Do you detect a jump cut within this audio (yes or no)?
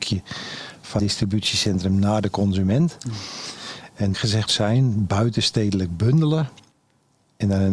yes